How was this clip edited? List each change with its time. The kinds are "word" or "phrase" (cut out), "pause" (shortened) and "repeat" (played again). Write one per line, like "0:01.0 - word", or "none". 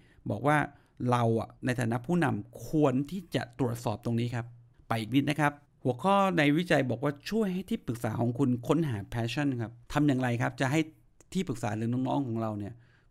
0:01.6 - pause
0:04.7 - pause
0:05.6 - pause
0:09.8 - pause

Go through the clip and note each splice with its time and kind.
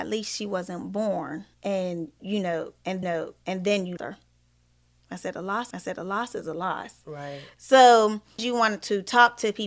0:01.5 - pause
0:03.0 - repeat
0:04.0 - word
0:05.7 - repeat
0:08.4 - word

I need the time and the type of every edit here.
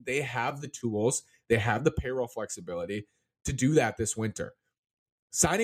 none

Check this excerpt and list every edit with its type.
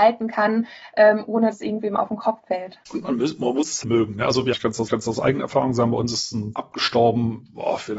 0:01.5 - word
0:02.8 - pause
0:03.8 - word
0:04.5 - word
0:04.9 - repeat
0:06.5 - word

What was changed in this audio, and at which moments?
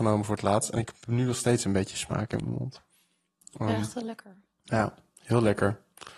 none

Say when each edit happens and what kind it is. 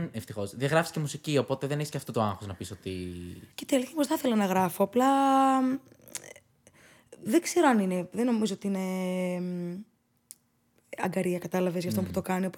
0:03.5 - pause

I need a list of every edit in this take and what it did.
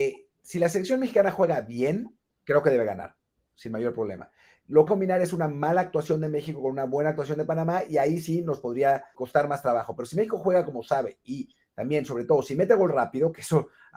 0:02.3 - pause
0:04.9 - phrase
0:09.1 - word

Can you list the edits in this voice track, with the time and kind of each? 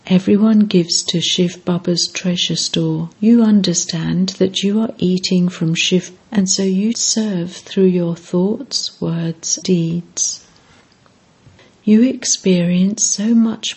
0:03.1 - pause
0:06.2 - phrase
0:06.9 - word
0:09.6 - word

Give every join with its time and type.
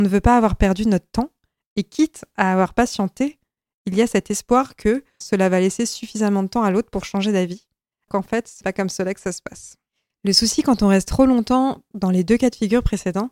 0:05.2 - word
0:08.1 - word
0:08.6 - word

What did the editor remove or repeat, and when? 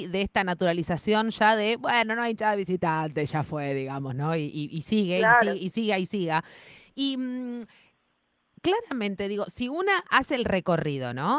none

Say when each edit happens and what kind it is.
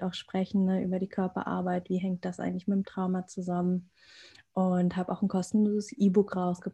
none

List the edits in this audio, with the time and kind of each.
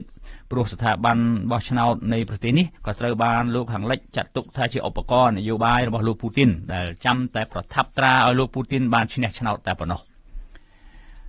0:02.8 - pause

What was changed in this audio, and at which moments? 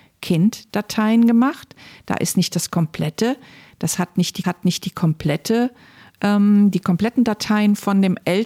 0:04.4 - repeat

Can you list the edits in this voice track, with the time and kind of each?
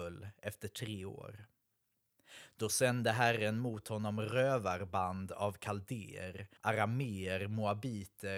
0:06.6 - pause

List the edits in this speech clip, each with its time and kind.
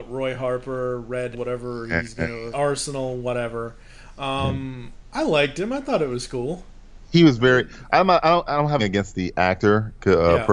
0:01.3 - word
0:02.5 - word
0:08.5 - word
0:08.8 - word

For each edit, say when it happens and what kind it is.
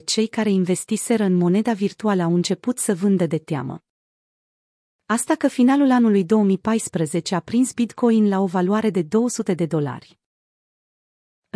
none

